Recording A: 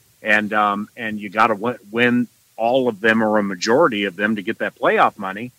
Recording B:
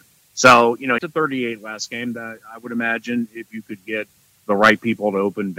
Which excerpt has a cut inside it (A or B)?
B